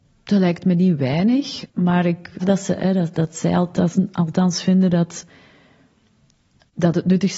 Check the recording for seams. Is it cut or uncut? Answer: cut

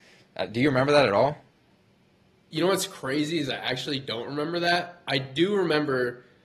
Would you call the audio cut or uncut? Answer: uncut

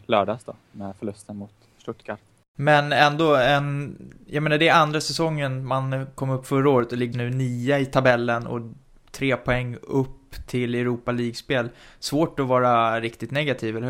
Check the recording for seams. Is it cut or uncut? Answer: cut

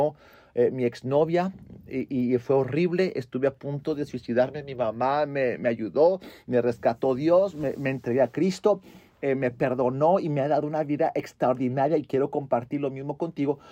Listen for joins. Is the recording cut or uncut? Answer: uncut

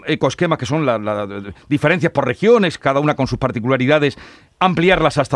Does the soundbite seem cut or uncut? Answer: uncut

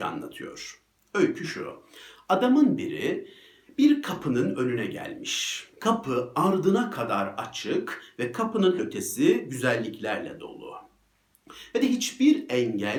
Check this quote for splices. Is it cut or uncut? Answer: cut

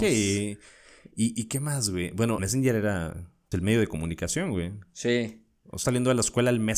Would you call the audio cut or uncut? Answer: cut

